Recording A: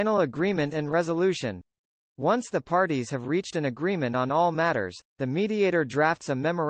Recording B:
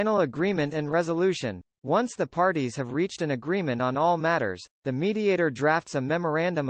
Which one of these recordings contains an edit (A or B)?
B